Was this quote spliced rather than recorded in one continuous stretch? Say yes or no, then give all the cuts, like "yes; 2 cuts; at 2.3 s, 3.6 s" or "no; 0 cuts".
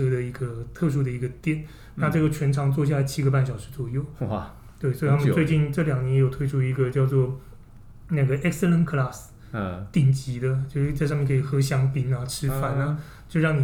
no; 0 cuts